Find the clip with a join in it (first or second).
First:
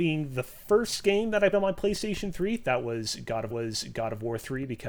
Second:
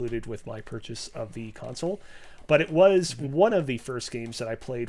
first